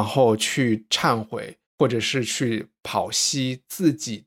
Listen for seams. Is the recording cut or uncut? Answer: cut